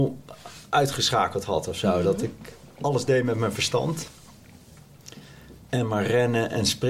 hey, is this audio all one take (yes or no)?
yes